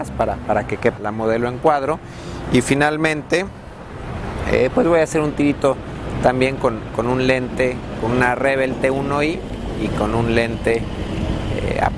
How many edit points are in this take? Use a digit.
1